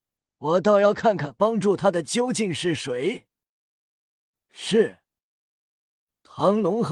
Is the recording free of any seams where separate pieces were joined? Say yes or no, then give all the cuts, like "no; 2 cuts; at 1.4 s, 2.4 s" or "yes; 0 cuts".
yes; 0 cuts